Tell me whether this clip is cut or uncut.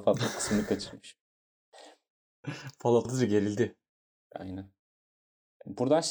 cut